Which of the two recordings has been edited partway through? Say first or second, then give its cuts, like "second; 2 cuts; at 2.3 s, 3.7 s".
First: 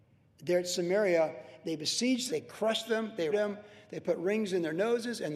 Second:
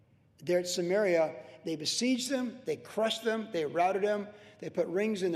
first; 2 cuts; at 2.3 s, 3.3 s